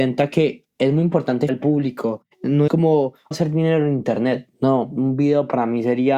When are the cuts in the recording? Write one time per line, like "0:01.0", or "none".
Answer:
0:01.5
0:02.7
0:03.3